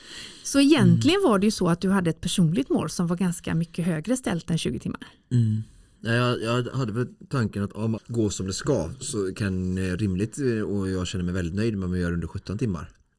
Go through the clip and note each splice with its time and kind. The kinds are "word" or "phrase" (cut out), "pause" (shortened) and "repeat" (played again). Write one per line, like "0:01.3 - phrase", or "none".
0:08.0 - word